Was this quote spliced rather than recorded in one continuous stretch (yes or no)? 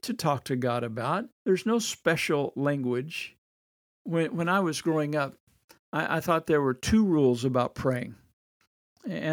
yes